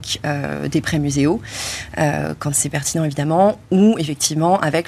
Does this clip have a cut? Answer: no; 0 cuts

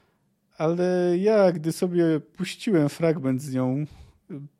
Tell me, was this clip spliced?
no; 0 cuts

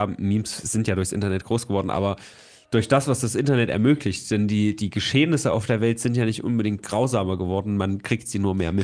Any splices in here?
no; 0 cuts

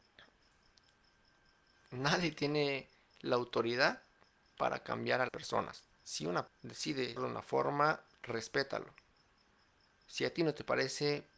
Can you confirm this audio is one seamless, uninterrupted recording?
no; 3 cuts; at 5.3 s, 6.5 s, 7.2 s

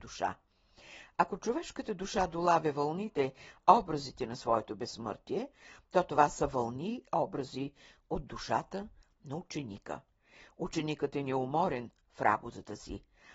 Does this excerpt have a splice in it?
no; 0 cuts

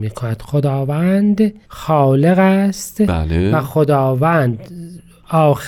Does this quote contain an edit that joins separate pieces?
yes; 1 cut; at 1.6 s

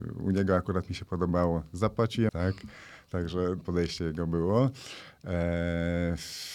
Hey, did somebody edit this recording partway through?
yes; 2 cuts; at 2.3 s, 3.6 s

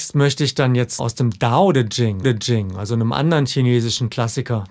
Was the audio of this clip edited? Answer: yes; 2 cuts; at 1.0 s, 2.2 s

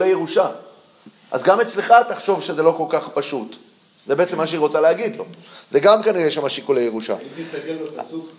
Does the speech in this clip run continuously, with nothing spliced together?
yes; 0 cuts

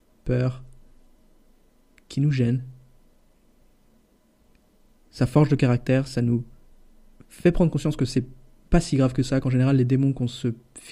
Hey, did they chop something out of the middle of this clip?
no; 0 cuts

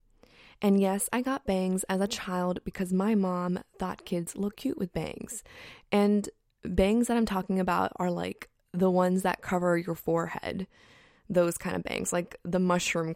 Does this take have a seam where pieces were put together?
no; 0 cuts

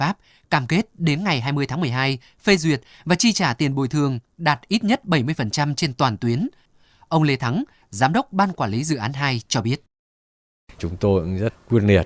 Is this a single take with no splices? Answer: yes; 0 cuts

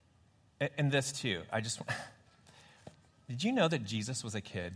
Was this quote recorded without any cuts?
yes; 0 cuts

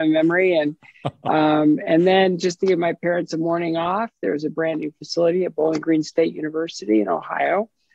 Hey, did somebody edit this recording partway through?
no; 0 cuts

